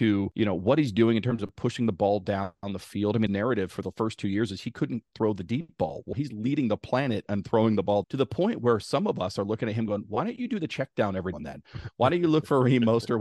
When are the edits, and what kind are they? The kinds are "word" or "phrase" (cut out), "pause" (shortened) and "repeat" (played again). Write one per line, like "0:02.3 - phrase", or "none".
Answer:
0:03.3 - word
0:06.1 - word
0:08.0 - word
0:11.3 - word